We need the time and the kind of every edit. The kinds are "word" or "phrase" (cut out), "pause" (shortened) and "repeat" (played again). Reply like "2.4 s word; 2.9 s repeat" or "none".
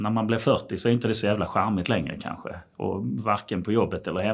none